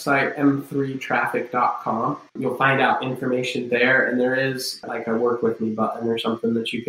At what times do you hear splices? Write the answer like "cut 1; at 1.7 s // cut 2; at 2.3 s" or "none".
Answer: cut 1; at 2.3 s